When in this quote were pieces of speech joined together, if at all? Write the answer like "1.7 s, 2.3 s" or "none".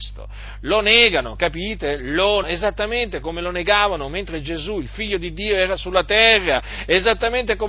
2.4 s